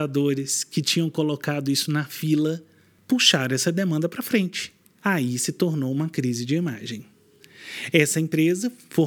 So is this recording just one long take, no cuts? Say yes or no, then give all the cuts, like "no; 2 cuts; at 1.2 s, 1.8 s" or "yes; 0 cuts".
yes; 0 cuts